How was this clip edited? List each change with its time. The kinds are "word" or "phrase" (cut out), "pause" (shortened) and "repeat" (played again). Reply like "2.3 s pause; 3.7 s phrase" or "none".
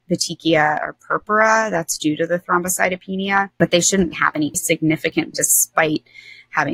4.1 s word; 4.5 s word; 5.3 s word